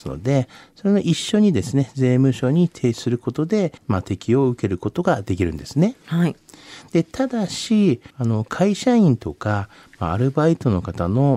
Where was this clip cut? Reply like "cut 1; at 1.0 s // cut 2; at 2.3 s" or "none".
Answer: cut 1; at 3.8 s // cut 2; at 8.1 s

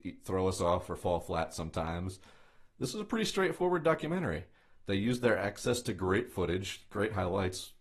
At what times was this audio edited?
none

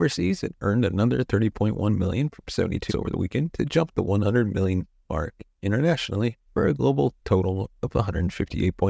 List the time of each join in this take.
cut 1; at 2.9 s // cut 2; at 6.5 s // cut 3; at 7.2 s

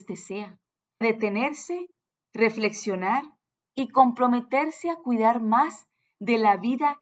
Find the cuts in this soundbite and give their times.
cut 1; at 1.0 s

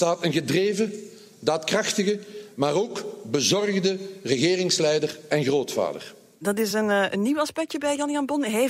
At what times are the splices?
none

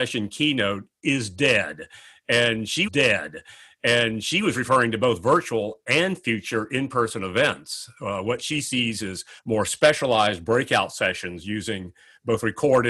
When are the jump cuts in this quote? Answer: cut 1; at 2.9 s // cut 2; at 9.4 s

